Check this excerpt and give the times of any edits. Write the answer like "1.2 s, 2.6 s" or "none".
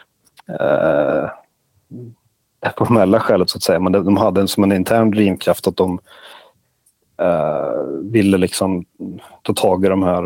none